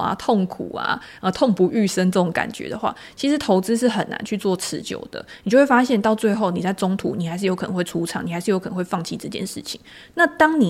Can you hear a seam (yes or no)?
no